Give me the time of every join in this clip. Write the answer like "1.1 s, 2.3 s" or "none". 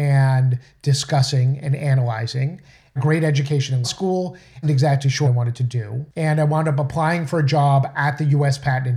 3.0 s, 3.8 s, 4.6 s, 5.2 s, 6.1 s